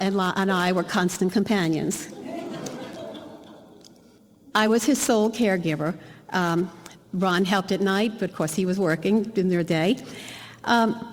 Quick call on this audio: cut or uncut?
uncut